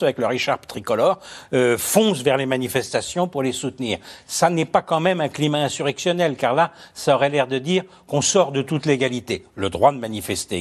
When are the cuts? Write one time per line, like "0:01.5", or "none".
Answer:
none